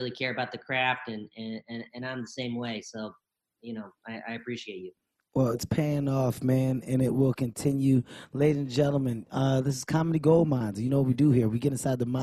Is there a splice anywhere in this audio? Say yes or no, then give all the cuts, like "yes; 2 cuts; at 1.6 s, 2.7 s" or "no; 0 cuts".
no; 0 cuts